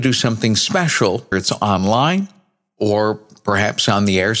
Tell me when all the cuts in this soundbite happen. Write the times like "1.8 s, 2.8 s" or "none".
1.3 s